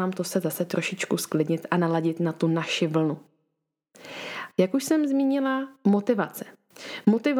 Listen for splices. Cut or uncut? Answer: uncut